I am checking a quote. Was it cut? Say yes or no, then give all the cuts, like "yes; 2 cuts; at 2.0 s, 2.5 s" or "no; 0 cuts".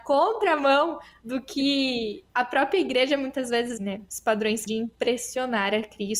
yes; 3 cuts; at 2.3 s, 3.8 s, 4.7 s